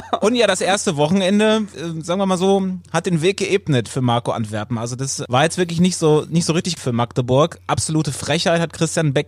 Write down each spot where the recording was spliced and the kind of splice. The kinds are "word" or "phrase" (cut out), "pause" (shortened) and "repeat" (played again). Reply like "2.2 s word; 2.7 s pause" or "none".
6.8 s word